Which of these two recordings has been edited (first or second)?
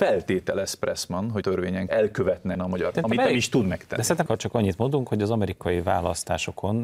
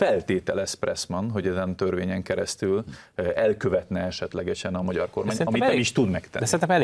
first